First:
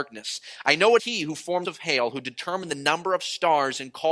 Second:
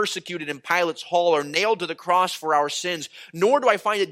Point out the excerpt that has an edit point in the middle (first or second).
first